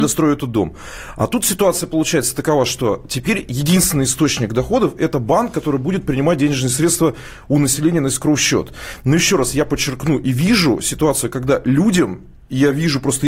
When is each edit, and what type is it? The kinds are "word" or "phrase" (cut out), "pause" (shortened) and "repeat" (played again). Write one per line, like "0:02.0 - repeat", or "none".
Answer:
none